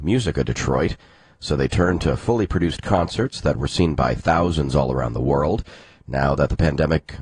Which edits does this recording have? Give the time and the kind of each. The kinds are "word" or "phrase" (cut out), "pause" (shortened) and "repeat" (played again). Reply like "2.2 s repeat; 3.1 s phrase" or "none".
none